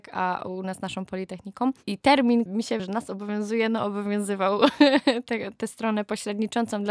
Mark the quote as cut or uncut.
cut